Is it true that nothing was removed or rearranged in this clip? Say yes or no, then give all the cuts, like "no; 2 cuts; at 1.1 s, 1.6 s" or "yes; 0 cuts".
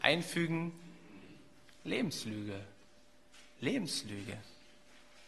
yes; 0 cuts